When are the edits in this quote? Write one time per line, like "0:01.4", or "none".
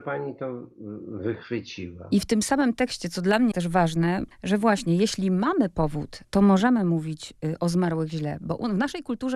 0:03.5
0:04.3
0:06.2